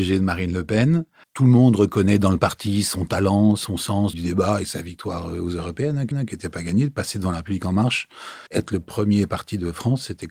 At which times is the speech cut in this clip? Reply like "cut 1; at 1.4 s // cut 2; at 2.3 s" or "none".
cut 1; at 1.2 s // cut 2; at 4.1 s // cut 3; at 6.1 s // cut 4; at 8.5 s